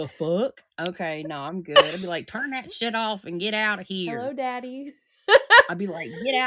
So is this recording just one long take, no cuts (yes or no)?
yes